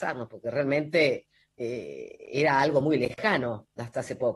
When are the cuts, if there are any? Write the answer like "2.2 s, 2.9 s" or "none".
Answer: none